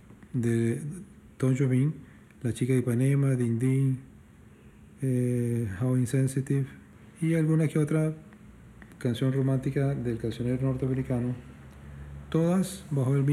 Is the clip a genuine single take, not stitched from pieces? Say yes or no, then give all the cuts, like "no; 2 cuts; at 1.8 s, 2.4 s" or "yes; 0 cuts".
yes; 0 cuts